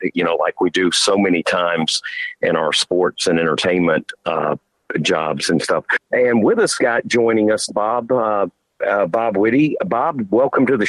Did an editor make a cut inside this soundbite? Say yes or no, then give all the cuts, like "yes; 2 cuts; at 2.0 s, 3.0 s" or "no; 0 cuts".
yes; 2 cuts; at 6.8 s, 7.7 s